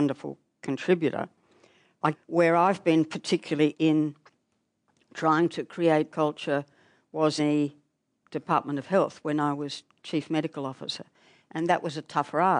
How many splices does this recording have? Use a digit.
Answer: 4